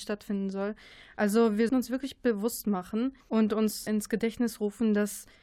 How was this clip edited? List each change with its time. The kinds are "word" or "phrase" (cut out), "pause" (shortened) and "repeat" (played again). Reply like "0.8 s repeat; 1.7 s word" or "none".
1.7 s word; 3.2 s pause; 3.9 s word